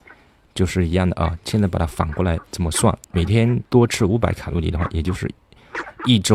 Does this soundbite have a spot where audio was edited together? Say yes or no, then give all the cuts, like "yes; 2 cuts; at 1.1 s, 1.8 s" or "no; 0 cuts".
yes; 2 cuts; at 3.0 s, 3.6 s